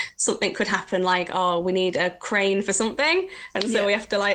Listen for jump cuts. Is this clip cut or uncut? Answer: uncut